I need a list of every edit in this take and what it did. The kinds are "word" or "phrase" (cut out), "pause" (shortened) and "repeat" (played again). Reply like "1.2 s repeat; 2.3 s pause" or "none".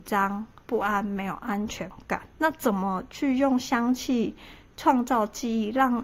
2.3 s pause